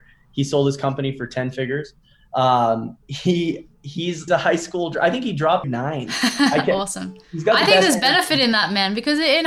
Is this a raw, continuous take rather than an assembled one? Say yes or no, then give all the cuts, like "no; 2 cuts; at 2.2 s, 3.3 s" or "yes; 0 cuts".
no; 4 cuts; at 3.0 s, 4.3 s, 5.6 s, 7.2 s